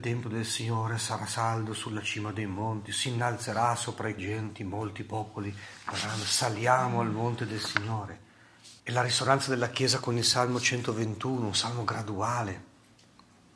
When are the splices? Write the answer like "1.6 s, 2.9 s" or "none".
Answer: 4.2 s, 8.8 s